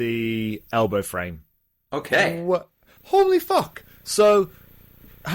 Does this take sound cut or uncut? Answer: cut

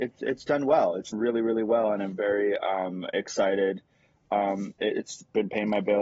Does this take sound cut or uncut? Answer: cut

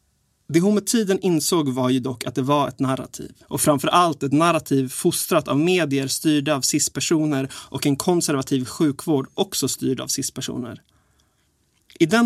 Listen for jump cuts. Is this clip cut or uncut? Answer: cut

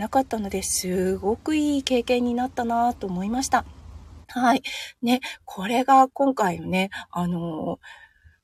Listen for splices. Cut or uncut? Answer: cut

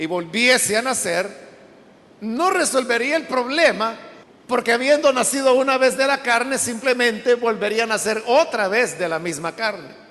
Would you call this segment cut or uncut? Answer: cut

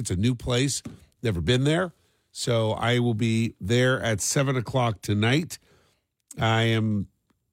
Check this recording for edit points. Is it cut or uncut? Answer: uncut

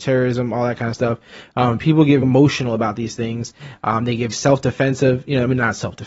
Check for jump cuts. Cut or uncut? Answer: cut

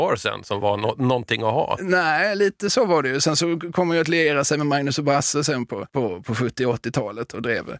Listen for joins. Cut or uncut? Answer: cut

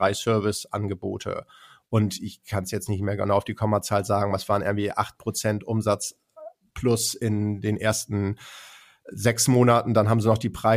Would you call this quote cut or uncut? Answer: uncut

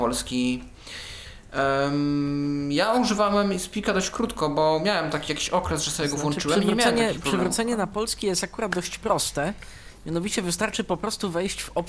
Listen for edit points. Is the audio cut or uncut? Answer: uncut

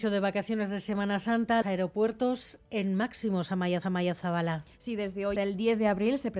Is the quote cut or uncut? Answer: cut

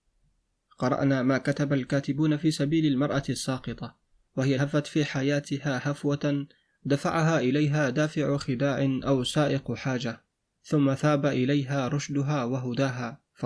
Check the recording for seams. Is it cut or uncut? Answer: cut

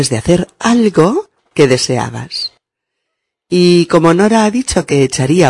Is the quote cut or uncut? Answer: uncut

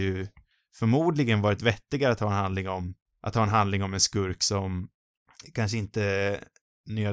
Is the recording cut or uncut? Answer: cut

